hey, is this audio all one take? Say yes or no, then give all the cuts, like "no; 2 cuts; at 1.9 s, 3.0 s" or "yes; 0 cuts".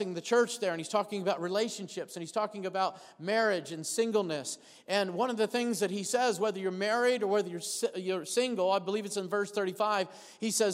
yes; 0 cuts